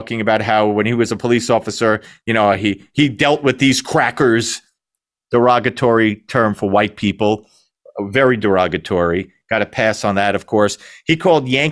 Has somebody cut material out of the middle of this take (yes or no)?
no